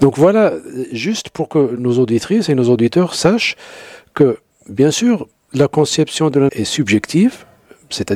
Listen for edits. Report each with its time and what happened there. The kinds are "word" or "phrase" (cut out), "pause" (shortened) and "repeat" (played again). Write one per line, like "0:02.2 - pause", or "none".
0:06.5 - word